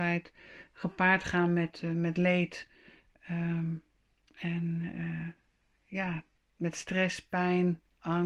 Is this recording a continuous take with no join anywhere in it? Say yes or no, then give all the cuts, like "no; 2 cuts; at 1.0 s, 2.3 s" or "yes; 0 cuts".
yes; 0 cuts